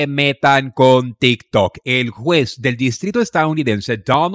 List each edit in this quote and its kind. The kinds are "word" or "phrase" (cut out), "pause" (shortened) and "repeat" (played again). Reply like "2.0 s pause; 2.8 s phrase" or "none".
none